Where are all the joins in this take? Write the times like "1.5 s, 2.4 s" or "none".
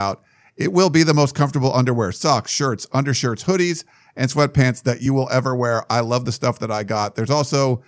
none